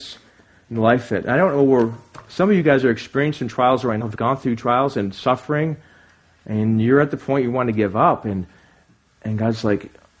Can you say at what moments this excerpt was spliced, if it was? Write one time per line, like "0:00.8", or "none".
0:04.0

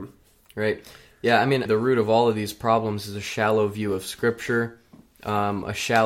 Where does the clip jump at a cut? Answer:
0:01.7

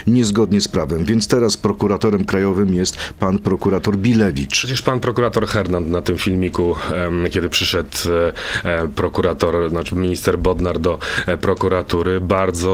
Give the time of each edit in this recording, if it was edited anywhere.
none

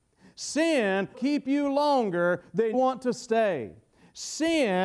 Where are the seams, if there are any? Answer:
0:01.1
0:02.7

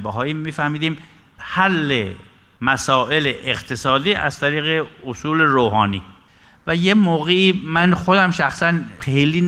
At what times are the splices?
none

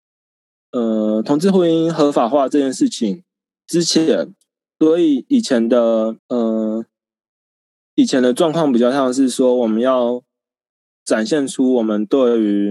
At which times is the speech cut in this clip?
0:06.2

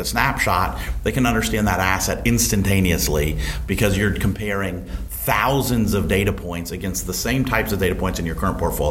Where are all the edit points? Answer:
none

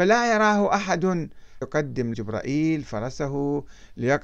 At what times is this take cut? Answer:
0:01.6
0:02.1

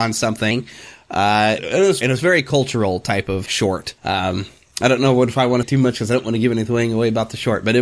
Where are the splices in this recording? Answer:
0:01.6
0:02.0
0:03.5
0:04.0
0:05.6

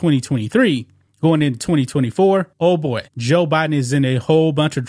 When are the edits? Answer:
0:01.1
0:02.5
0:03.1

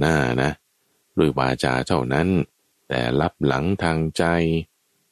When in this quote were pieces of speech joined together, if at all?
0:02.6

